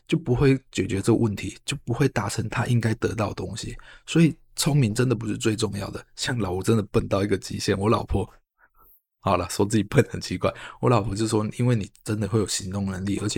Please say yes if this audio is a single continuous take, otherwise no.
yes